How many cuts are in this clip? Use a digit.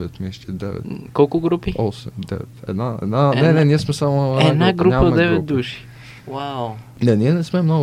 1